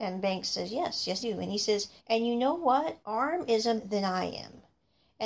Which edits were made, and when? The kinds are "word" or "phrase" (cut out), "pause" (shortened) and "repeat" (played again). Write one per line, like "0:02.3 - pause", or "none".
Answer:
0:01.2 - word
0:02.0 - pause
0:03.0 - pause
0:03.8 - phrase